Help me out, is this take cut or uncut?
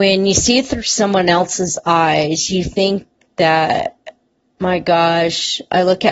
uncut